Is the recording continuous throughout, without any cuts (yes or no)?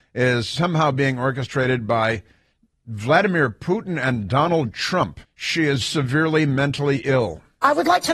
no